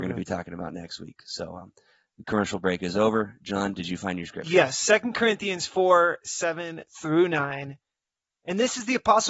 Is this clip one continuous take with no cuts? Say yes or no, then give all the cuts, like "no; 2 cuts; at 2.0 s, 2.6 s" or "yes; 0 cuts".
yes; 0 cuts